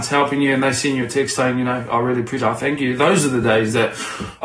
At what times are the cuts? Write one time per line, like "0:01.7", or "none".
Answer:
none